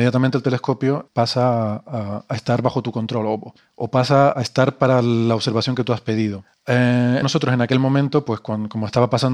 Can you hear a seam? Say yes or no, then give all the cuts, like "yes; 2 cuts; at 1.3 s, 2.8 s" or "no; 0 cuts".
yes; 3 cuts; at 1.1 s, 4.3 s, 7.2 s